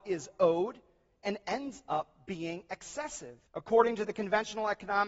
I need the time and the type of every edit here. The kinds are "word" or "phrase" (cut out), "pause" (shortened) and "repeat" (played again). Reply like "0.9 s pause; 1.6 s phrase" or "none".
3.5 s pause